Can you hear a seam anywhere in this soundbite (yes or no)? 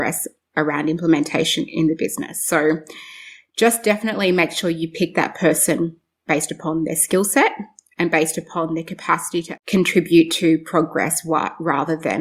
yes